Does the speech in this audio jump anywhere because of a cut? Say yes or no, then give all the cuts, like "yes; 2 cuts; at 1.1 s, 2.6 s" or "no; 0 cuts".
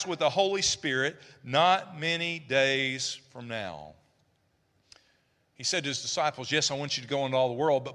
no; 0 cuts